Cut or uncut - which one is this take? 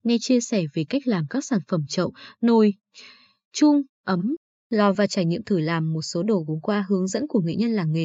uncut